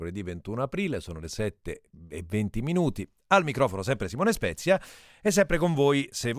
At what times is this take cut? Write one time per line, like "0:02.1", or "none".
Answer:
none